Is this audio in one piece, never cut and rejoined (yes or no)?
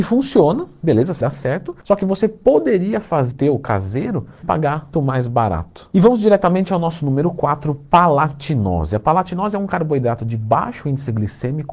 no